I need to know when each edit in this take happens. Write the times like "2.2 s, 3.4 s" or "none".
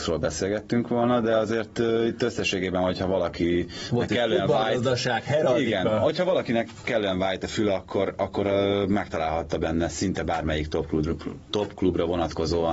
none